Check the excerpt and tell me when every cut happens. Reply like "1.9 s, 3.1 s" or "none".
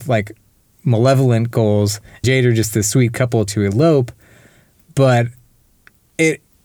2.2 s, 3.5 s